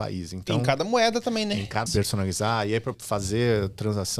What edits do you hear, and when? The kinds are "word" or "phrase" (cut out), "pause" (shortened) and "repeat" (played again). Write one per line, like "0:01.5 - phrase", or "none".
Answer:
0:01.9 - phrase
0:02.9 - word